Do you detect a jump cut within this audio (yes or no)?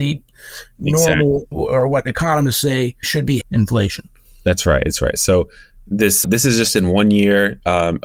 yes